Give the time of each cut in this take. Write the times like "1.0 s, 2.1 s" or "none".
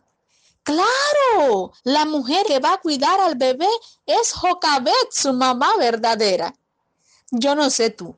1.8 s, 2.4 s